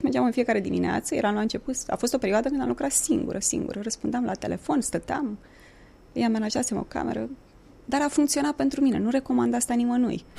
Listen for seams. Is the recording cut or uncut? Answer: uncut